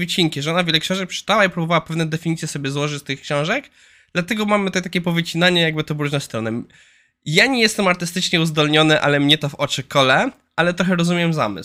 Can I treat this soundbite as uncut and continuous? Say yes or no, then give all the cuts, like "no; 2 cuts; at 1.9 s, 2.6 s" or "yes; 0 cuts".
yes; 0 cuts